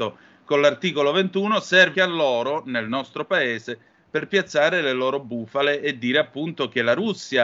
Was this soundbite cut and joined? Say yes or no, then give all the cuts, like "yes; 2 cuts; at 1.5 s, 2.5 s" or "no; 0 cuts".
yes; 1 cut; at 1.9 s